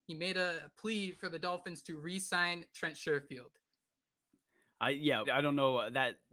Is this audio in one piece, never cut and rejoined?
no; 1 cut; at 5.2 s

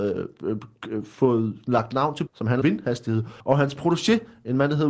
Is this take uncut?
no; 3 cuts; at 2.3 s, 2.6 s, 3.4 s

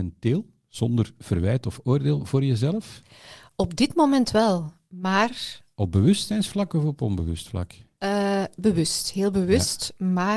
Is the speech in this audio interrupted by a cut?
no; 0 cuts

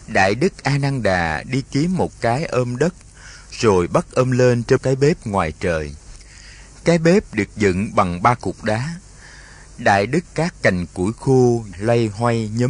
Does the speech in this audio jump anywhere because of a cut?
yes; 3 cuts; at 4.8 s, 10.2 s, 11.7 s

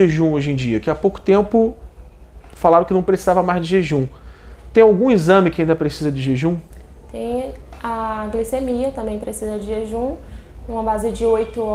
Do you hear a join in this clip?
no; 0 cuts

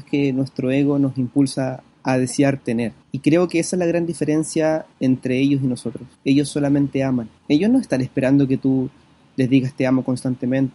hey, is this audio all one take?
no; 5 cuts; at 1.9 s, 3.0 s, 4.9 s, 6.1 s, 7.4 s

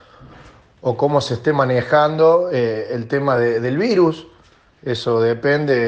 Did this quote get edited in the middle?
no; 0 cuts

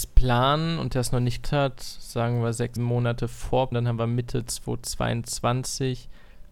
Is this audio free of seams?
no; 3 cuts; at 1.4 s, 2.8 s, 3.7 s

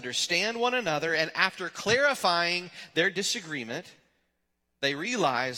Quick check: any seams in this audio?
no; 0 cuts

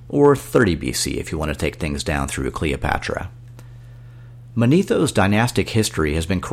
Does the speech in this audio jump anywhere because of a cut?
no; 0 cuts

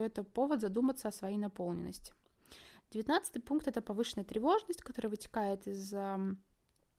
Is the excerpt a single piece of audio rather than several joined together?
yes; 0 cuts

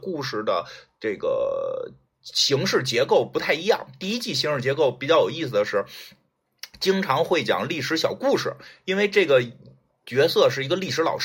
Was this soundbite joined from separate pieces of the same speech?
no; 0 cuts

